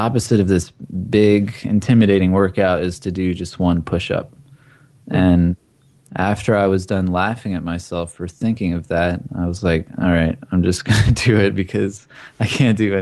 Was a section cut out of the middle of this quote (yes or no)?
no